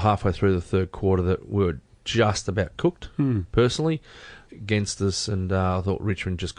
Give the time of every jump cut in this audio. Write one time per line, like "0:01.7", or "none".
0:04.5